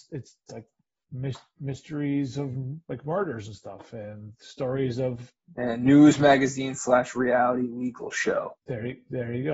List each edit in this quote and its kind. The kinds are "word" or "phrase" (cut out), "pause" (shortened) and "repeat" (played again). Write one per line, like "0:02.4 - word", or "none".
0:05.4 - pause
0:08.6 - pause